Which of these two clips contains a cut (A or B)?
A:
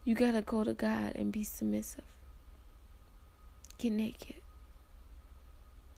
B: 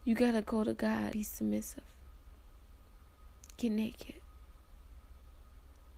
B